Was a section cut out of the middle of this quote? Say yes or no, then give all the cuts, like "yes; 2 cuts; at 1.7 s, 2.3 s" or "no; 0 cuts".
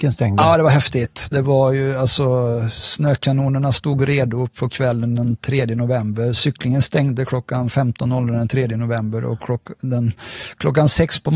no; 0 cuts